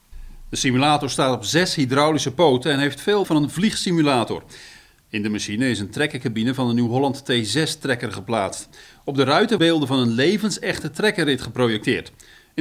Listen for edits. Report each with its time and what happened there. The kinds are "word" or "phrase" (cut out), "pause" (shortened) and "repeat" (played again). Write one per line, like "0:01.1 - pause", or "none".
0:03.2 - word
0:09.6 - word